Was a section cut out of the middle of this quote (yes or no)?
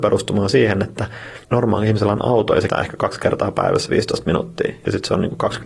yes